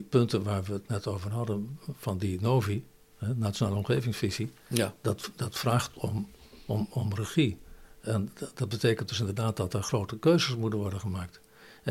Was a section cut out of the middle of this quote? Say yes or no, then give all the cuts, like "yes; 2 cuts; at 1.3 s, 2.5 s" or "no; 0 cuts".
no; 0 cuts